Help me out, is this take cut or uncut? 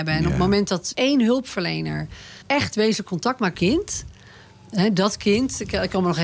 cut